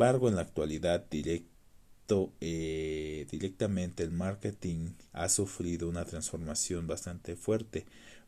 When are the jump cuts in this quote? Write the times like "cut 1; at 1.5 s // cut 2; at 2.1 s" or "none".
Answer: cut 1; at 5.1 s